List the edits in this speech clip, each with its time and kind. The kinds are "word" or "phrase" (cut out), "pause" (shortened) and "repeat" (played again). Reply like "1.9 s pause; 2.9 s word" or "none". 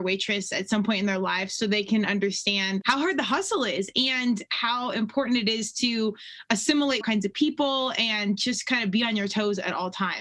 2.8 s word; 7.0 s phrase

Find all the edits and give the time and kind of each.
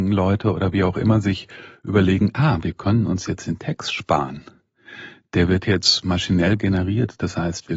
none

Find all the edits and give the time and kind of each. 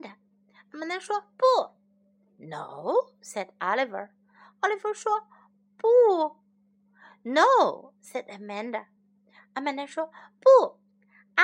none

